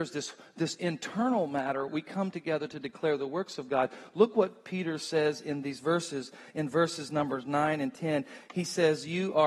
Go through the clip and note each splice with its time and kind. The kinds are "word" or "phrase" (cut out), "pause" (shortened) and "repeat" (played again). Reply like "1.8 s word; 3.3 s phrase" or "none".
1.9 s word